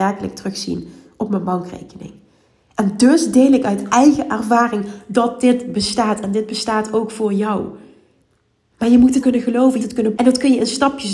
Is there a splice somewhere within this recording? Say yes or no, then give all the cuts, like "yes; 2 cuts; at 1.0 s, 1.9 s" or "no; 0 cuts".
yes; 3 cuts; at 9.2 s, 9.8 s, 10.2 s